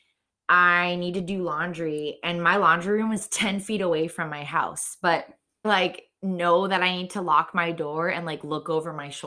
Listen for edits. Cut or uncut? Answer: cut